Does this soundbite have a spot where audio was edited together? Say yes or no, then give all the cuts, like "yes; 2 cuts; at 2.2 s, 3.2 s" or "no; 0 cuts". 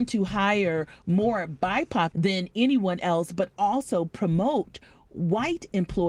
yes; 1 cut; at 2.1 s